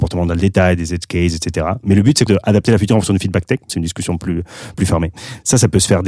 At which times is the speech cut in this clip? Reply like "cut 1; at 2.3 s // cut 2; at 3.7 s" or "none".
cut 1; at 2.3 s // cut 2; at 3.7 s // cut 3; at 4.7 s